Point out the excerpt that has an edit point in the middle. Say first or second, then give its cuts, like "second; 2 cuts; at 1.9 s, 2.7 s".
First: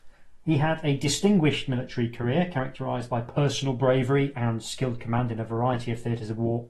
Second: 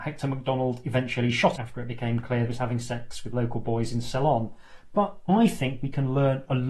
second; 2 cuts; at 1.6 s, 2.5 s